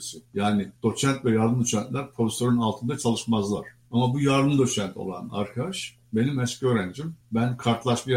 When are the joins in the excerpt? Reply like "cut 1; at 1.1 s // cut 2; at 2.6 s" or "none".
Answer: none